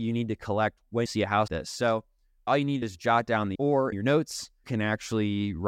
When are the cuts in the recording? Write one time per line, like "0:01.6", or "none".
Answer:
0:01.1
0:01.5
0:02.5
0:02.8
0:03.5
0:03.9
0:04.6